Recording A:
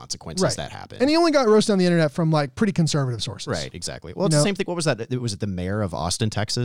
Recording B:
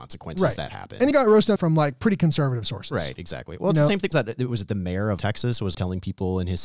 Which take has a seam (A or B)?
B